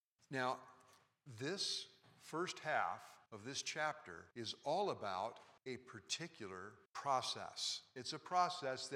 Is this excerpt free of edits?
no; 4 cuts; at 3.3 s, 4.3 s, 5.6 s, 6.9 s

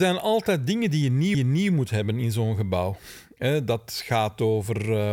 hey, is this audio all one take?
no; 1 cut; at 1.3 s

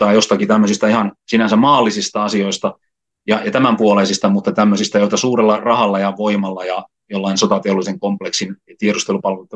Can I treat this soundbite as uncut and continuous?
yes; 0 cuts

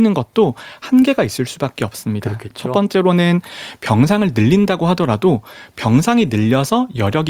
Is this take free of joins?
yes; 0 cuts

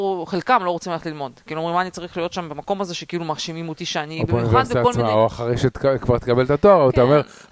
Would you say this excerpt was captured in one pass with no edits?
yes; 0 cuts

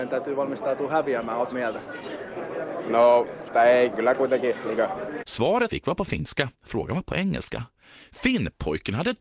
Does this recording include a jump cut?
yes; 5 cuts; at 1.5 s, 3.5 s, 3.9 s, 5.7 s, 6.5 s

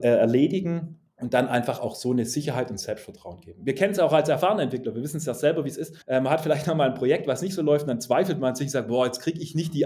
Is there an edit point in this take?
yes; 1 cut; at 6.0 s

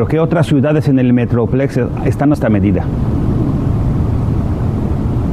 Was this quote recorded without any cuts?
no; 1 cut; at 2.3 s

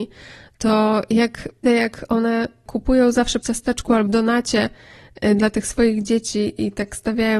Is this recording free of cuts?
no; 3 cuts; at 1.6 s, 3.4 s, 4.1 s

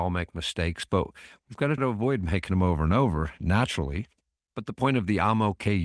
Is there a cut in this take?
yes; 1 cut; at 1.8 s

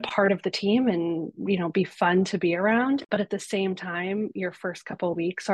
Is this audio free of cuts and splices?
yes; 0 cuts

